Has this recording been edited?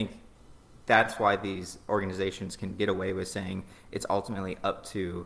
no; 0 cuts

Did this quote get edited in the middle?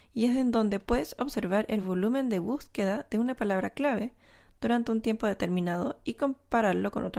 no; 0 cuts

